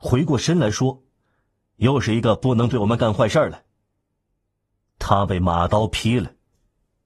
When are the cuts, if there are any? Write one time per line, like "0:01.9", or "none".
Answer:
none